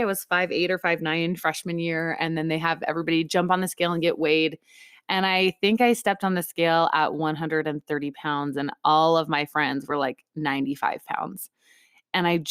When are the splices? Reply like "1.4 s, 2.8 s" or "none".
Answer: none

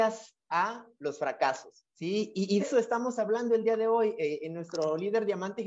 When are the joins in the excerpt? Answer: 1.9 s, 2.6 s

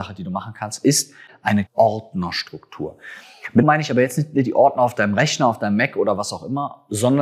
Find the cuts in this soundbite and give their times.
1.7 s, 3.6 s

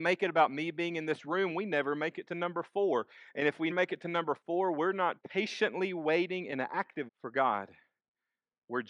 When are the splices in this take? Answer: 3.7 s, 5.2 s, 7.1 s

